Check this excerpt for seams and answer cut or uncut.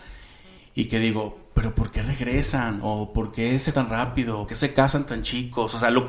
cut